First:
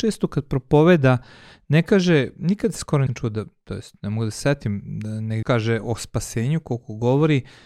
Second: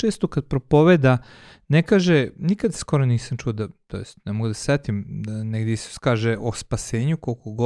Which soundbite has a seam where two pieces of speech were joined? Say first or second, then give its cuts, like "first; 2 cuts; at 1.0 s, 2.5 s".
first; 2 cuts; at 3.1 s, 5.4 s